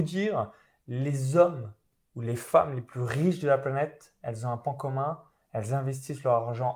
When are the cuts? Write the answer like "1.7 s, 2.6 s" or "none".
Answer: none